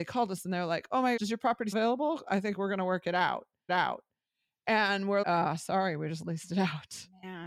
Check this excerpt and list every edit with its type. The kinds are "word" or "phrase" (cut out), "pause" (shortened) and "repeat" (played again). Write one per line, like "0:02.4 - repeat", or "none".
0:01.2 - word
0:01.7 - word
0:03.7 - repeat
0:05.2 - word